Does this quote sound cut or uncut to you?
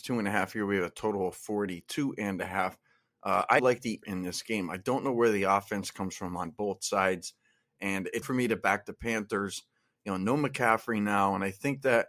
cut